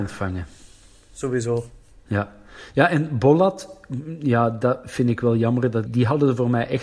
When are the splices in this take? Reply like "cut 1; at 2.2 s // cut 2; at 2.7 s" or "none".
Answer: cut 1; at 5.9 s